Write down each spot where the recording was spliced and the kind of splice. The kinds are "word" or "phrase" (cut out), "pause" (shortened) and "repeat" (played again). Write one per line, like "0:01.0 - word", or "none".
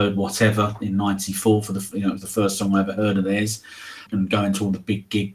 0:04.1 - word

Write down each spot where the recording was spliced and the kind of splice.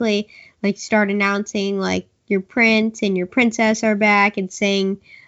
none

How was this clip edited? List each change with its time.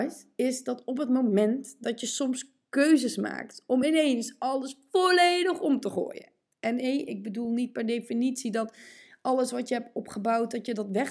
none

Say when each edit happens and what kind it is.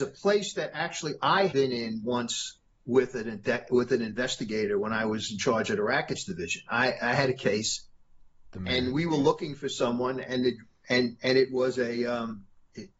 0:01.5 - word

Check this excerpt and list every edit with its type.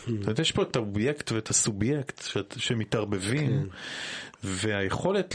none

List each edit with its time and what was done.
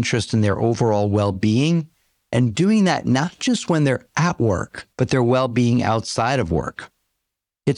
0:04.9 - pause

